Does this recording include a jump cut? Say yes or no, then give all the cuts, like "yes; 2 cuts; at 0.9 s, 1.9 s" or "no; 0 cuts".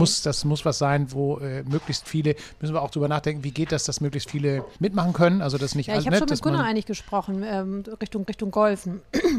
yes; 2 cuts; at 4.8 s, 8.2 s